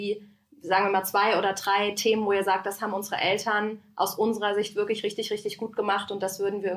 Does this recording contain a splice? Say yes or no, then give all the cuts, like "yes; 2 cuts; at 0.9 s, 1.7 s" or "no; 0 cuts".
no; 0 cuts